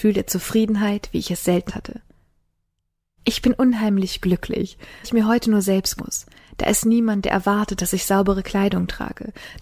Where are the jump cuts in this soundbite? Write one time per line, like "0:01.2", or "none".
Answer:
0:01.7
0:05.0
0:06.0